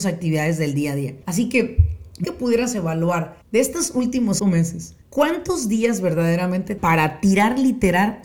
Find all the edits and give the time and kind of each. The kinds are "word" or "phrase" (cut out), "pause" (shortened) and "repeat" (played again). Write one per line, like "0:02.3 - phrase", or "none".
0:01.2 - pause
0:02.2 - word
0:03.4 - pause
0:04.4 - word
0:05.0 - pause
0:06.8 - phrase